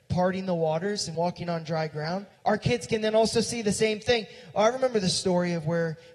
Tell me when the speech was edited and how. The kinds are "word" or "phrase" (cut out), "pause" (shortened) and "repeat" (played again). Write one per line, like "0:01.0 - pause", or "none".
0:01.1 - word
0:02.3 - pause

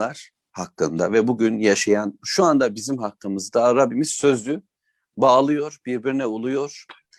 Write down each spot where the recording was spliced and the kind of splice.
0:02.2 - phrase

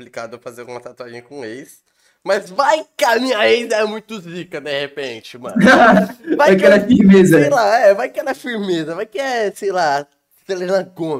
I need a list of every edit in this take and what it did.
none

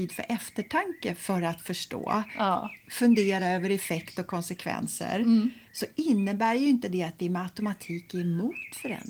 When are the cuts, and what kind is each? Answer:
0:05.7 - pause

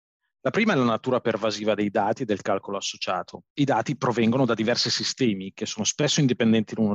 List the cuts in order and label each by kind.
0:03.5 - pause

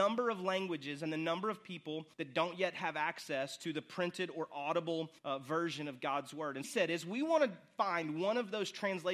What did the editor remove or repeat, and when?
0:02.1 - pause
0:05.2 - pause
0:06.6 - phrase

